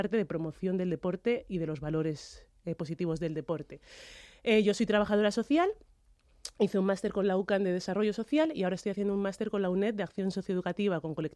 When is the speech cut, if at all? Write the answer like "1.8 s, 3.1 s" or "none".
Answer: none